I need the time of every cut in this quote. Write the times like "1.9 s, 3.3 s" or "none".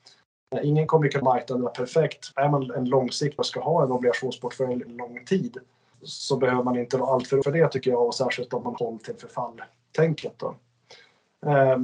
1.2 s, 2.3 s, 3.4 s, 4.9 s, 5.9 s, 7.4 s, 8.8 s